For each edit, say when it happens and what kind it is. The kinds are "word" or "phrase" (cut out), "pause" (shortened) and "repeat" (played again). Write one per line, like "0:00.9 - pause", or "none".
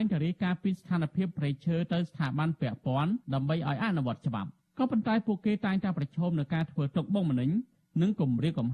0:03.2 - pause